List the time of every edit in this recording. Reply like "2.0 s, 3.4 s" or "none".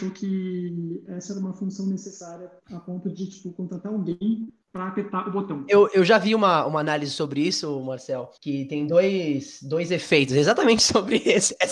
2.6 s, 4.6 s, 8.4 s